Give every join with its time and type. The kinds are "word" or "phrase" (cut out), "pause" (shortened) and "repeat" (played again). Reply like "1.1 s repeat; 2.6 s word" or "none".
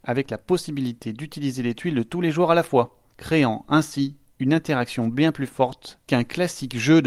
none